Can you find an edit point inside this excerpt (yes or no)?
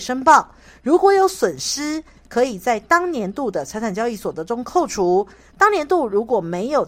no